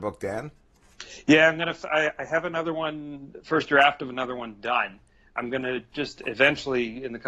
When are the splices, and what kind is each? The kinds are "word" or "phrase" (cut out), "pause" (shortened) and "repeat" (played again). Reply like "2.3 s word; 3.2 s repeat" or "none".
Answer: none

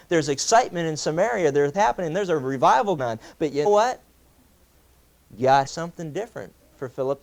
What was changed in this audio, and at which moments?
1.7 s word; 3.0 s word; 3.6 s word; 5.6 s word

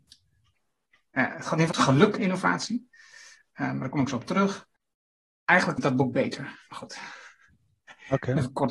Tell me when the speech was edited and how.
1.7 s word; 2.2 s word; 5.8 s word

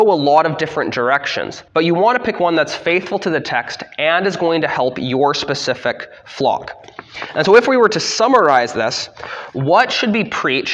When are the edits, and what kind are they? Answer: 1.7 s pause

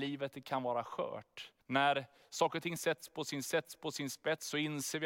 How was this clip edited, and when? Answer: 1.6 s pause; 3.5 s repeat

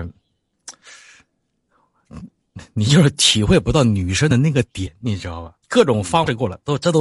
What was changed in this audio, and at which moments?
5.6 s pause

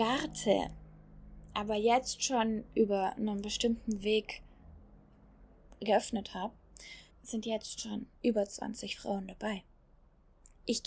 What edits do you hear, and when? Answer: 7.1 s pause; 8.1 s pause

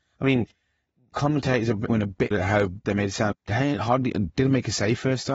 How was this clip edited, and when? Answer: 1.1 s word; 1.9 s word; 2.3 s word; 2.8 s word; 3.3 s word

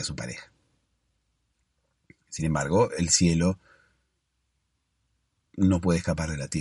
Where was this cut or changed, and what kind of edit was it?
none

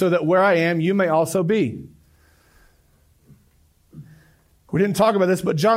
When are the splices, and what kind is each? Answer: none

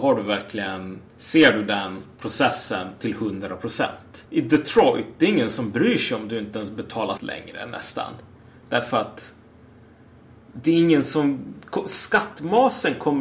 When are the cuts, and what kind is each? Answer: 1.1 s pause; 4.2 s pause; 7.2 s word

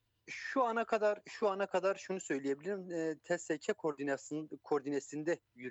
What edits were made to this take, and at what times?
none

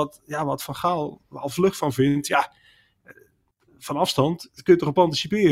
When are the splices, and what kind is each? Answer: none

